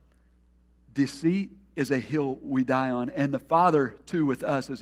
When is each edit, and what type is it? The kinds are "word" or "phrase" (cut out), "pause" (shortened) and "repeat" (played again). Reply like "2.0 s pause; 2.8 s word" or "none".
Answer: none